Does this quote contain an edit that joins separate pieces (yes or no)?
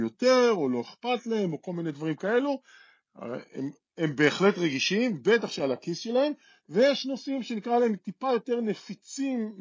no